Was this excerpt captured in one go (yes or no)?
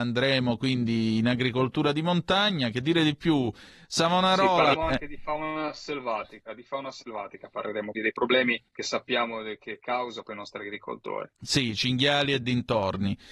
no